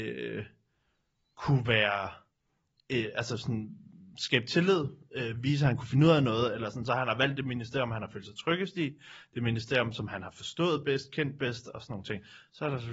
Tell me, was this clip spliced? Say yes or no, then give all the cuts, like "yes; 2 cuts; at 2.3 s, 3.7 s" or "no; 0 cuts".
no; 0 cuts